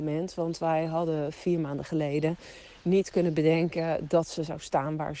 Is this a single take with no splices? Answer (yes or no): yes